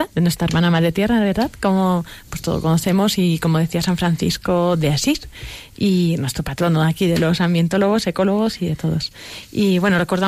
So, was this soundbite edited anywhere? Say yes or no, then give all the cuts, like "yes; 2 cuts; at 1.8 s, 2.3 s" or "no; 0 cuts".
no; 0 cuts